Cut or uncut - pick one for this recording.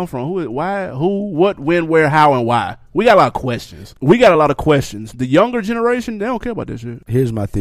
uncut